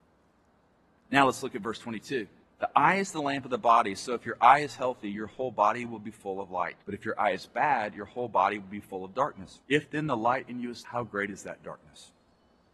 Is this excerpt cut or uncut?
cut